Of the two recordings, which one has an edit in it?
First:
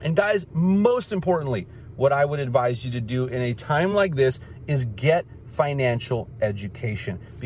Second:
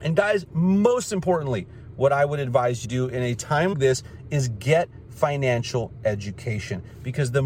second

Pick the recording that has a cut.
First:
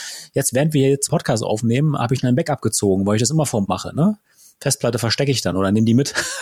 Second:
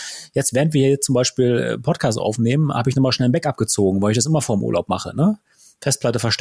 first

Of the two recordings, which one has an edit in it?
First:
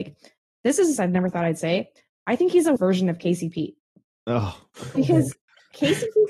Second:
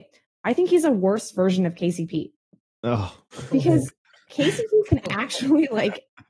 first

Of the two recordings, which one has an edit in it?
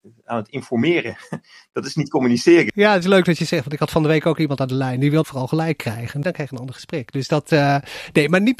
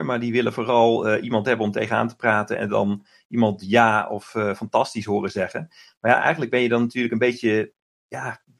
first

